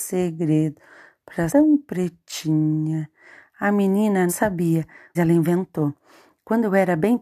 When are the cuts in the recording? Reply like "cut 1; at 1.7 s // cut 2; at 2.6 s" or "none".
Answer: cut 1; at 1.5 s // cut 2; at 4.3 s // cut 3; at 5.2 s